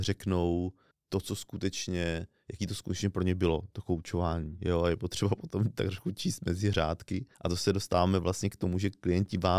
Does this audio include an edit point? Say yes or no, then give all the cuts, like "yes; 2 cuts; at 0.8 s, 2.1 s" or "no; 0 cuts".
yes; 2 cuts; at 0.9 s, 7.3 s